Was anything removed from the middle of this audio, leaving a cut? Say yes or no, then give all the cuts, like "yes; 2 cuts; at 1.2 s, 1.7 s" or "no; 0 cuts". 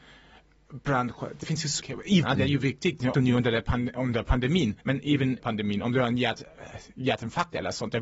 yes; 6 cuts; at 1.4 s, 1.8 s, 2.2 s, 3.1 s, 4.8 s, 5.4 s